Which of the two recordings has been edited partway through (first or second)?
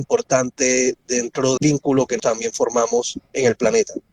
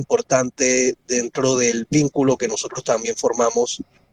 first